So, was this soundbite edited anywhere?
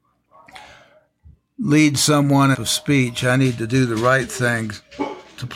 yes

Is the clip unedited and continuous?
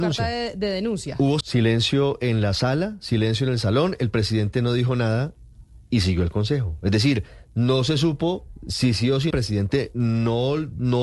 no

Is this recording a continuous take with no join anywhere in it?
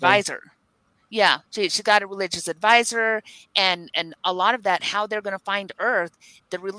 no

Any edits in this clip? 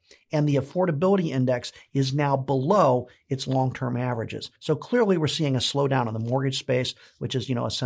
yes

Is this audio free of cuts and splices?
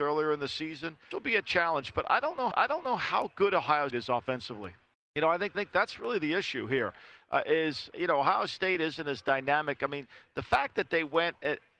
no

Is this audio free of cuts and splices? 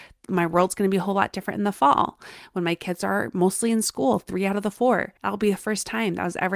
no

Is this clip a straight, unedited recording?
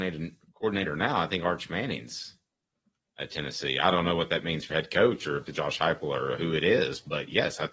no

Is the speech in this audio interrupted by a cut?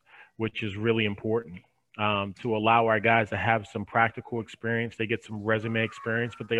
no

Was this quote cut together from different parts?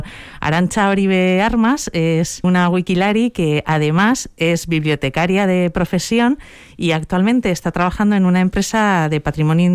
no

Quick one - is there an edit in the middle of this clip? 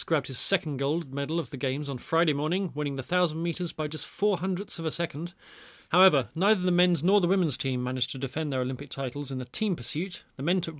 no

